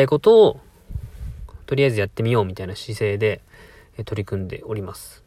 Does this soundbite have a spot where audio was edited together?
no; 0 cuts

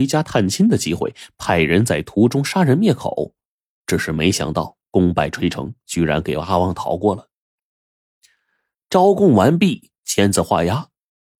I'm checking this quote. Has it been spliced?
no; 0 cuts

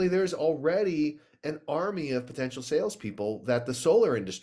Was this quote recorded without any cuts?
yes; 0 cuts

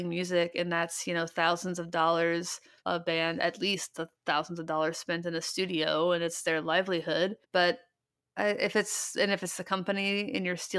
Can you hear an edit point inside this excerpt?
yes; 2 cuts; at 2.8 s, 7.4 s

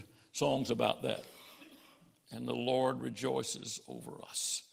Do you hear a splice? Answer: no; 0 cuts

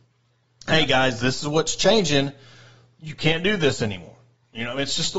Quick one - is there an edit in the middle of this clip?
no; 0 cuts

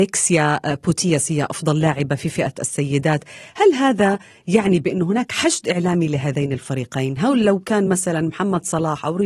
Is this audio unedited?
yes; 0 cuts

